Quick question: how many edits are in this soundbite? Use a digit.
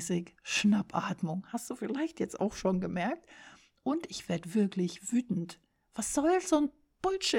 0